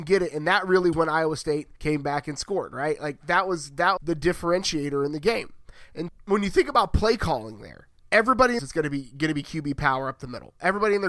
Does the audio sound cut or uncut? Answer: cut